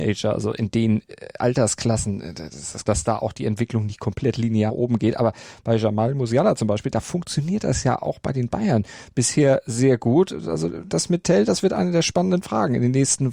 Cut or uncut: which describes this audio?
cut